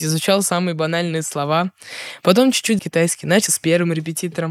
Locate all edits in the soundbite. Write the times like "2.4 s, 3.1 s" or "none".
2.8 s, 3.5 s